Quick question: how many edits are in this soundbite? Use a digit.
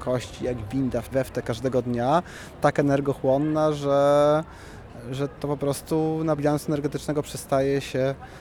3